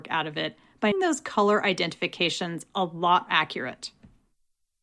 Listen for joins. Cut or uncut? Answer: cut